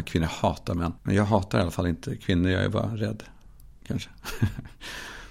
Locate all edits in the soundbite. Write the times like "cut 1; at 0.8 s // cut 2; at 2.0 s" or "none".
cut 1; at 1.0 s